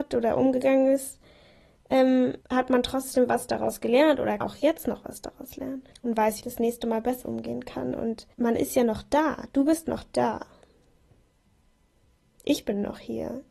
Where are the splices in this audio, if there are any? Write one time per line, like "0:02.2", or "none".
0:02.4
0:04.4
0:05.9
0:06.4
0:07.2
0:08.3